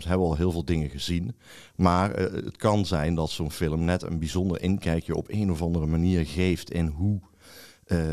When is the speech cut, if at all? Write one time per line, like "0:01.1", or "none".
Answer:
none